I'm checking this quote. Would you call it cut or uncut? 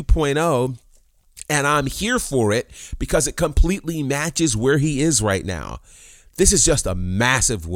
uncut